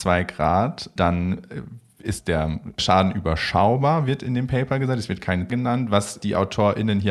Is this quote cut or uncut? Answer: cut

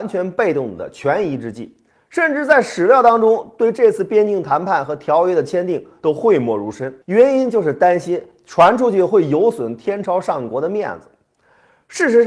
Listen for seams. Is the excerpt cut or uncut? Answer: cut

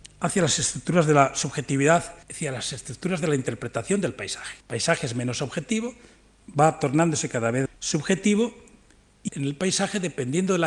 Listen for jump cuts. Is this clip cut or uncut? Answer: cut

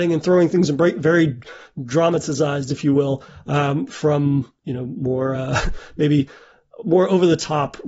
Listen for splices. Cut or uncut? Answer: uncut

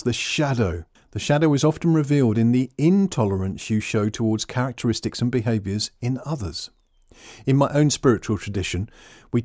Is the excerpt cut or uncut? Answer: uncut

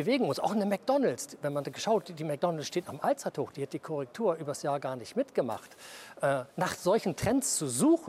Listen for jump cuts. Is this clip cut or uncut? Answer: cut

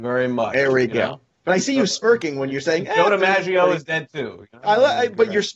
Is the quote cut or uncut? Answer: uncut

